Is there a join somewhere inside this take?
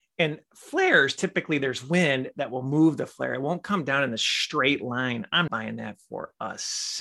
yes; 1 cut; at 5.5 s

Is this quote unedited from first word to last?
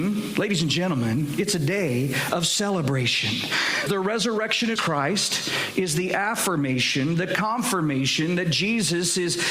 no; 2 cuts; at 3.9 s, 4.8 s

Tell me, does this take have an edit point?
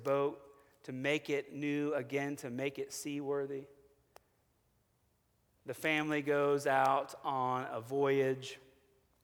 no; 0 cuts

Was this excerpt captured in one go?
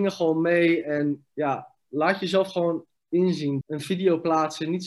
no; 2 cuts; at 3.0 s, 3.6 s

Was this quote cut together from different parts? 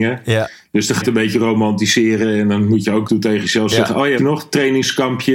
yes; 3 cuts; at 1.0 s, 3.1 s, 4.2 s

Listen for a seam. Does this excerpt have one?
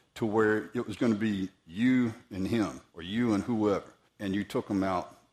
yes; 3 cuts; at 1.0 s, 2.9 s, 4.1 s

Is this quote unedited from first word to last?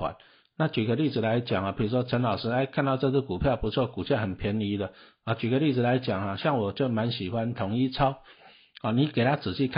yes; 0 cuts

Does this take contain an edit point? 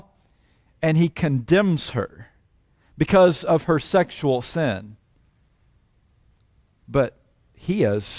no; 0 cuts

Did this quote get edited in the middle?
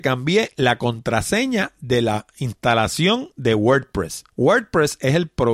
no; 0 cuts

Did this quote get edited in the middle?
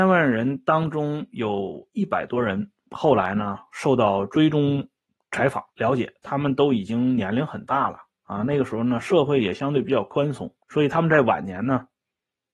yes; 3 cuts; at 5.0 s, 5.7 s, 10.6 s

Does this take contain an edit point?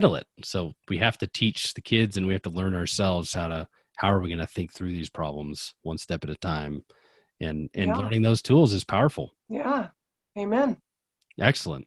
yes; 1 cut; at 9.4 s

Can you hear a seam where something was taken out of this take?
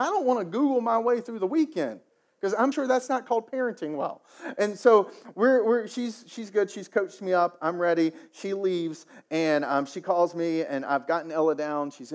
yes; 1 cut; at 2.7 s

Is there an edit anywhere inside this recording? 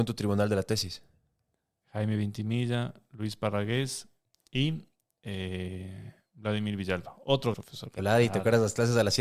yes; 2 cuts; at 7.5 s, 8.0 s

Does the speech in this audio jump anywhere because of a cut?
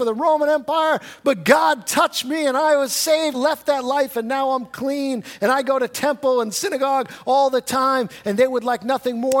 yes; 1 cut; at 3.3 s

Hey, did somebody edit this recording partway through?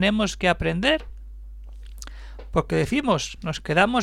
no; 0 cuts

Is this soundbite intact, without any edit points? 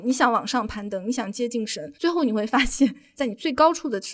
no; 1 cut; at 1.9 s

